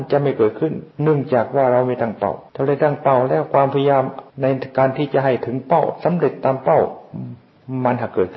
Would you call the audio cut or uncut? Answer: cut